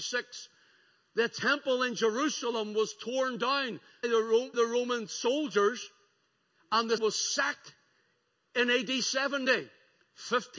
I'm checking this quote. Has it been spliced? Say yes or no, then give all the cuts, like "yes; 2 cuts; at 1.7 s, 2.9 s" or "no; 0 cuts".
yes; 3 cuts; at 4.0 s, 4.5 s, 7.0 s